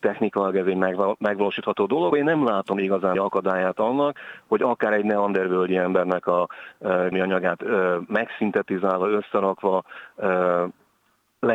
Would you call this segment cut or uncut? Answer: cut